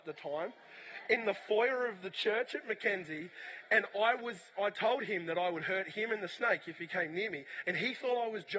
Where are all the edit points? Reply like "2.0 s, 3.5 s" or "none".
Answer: none